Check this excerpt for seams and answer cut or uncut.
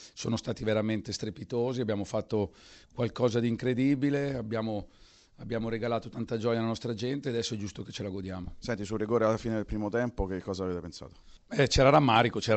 uncut